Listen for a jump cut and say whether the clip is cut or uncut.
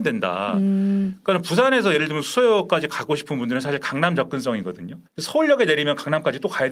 cut